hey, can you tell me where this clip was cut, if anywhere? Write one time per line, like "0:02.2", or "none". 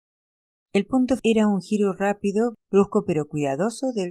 0:01.2
0:02.6